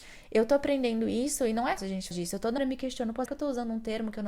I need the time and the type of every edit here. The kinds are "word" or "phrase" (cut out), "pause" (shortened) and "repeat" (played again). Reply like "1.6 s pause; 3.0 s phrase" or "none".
1.8 s word; 2.1 s word; 2.6 s word; 3.3 s word